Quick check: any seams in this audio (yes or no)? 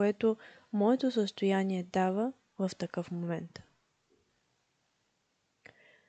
no